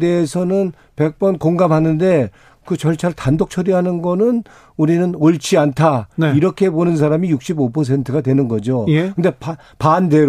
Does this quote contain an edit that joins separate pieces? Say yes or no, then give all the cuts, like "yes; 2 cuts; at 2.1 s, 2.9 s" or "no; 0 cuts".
no; 0 cuts